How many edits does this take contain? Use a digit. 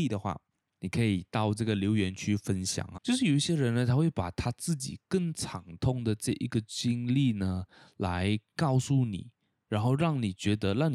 1